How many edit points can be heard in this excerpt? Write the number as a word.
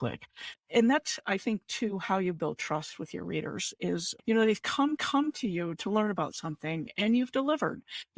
one